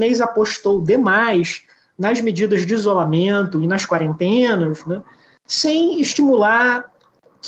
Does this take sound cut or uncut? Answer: uncut